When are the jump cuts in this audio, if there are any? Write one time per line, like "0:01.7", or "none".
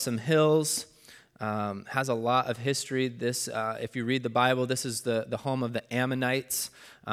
none